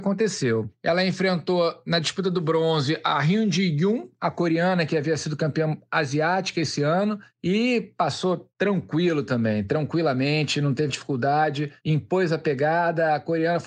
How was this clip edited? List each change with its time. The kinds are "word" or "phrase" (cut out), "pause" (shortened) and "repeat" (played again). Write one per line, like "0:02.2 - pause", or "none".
0:10.9 - word